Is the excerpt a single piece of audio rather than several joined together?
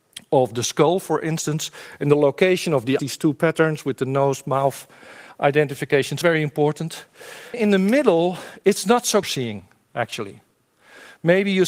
no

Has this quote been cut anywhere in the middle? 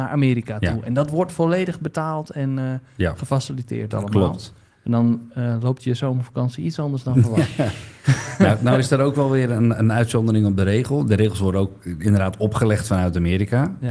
no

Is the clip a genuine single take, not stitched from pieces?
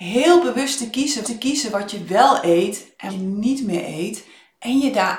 no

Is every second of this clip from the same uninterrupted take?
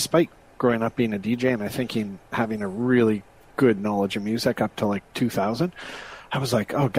yes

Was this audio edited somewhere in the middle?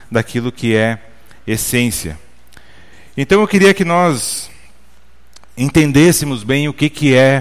no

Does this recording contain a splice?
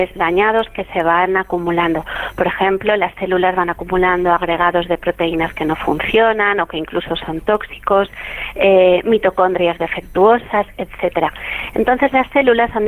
no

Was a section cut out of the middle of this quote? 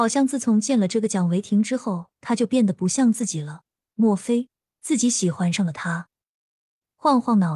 no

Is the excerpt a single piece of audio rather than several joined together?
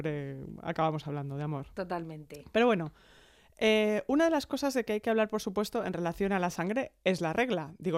yes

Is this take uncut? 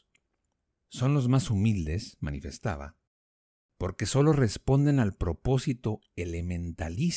yes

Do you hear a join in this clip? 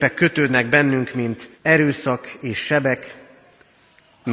yes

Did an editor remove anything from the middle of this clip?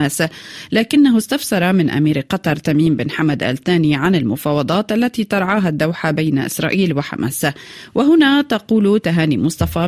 no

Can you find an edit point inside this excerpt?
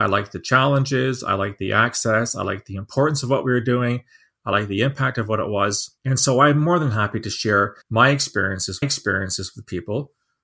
yes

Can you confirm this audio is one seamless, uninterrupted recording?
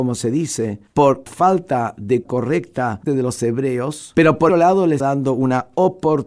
no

